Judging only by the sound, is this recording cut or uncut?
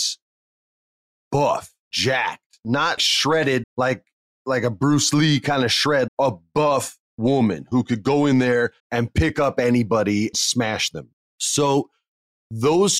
cut